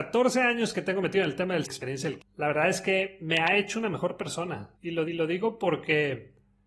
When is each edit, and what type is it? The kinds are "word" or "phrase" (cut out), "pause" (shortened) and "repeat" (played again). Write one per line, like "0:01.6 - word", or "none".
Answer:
0:01.6 - phrase
0:02.2 - word
0:04.7 - pause
0:05.0 - repeat